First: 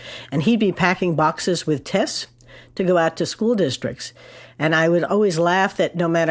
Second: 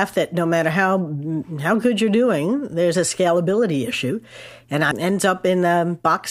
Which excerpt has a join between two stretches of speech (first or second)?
second